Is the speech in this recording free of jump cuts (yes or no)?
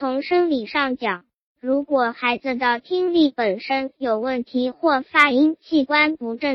yes